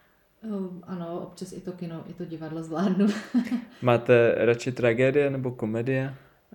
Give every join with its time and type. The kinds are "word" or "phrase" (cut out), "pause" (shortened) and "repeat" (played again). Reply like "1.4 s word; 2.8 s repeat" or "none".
none